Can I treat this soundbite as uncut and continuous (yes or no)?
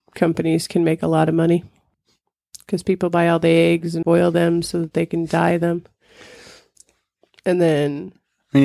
no